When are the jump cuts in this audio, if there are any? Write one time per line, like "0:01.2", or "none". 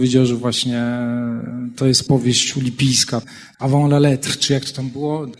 none